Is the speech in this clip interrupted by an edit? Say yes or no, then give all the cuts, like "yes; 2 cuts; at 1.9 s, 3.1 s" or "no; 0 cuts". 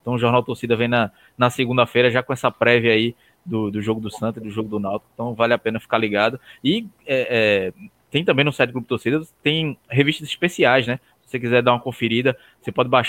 no; 0 cuts